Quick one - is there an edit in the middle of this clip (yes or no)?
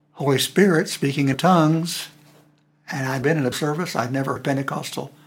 yes